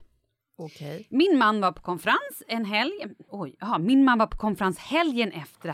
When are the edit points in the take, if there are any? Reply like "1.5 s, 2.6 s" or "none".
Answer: 3.3 s